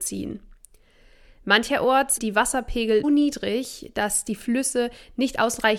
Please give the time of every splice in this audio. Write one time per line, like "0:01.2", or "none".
0:02.2
0:03.0